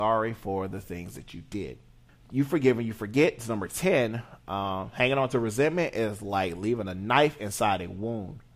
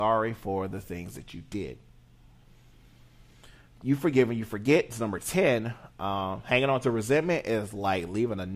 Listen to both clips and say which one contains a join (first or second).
first